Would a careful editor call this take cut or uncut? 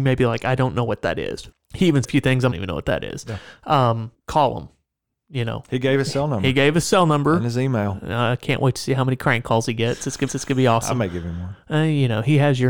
cut